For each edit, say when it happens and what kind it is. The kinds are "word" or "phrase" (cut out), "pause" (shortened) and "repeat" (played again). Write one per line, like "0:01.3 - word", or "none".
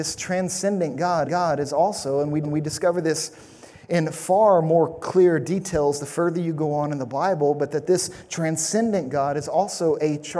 0:01.2 - repeat
0:02.4 - repeat